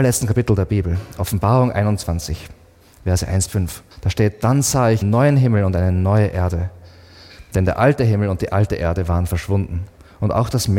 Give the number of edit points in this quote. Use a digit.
3